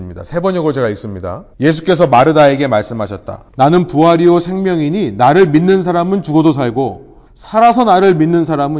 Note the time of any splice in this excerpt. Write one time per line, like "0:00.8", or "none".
0:01.5
0:03.5
0:07.3